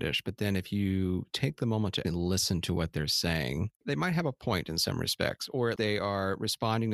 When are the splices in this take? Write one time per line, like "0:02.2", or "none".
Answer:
0:02.0
0:05.8